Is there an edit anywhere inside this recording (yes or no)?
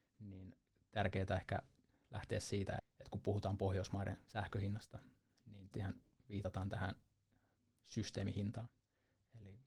yes